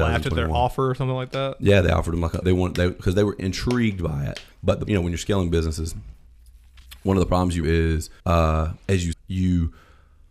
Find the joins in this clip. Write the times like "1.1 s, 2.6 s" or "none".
2.4 s, 4.5 s, 4.9 s, 7.6 s, 8.2 s, 9.1 s